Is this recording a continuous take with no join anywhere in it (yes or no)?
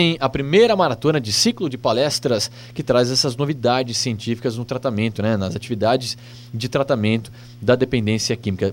yes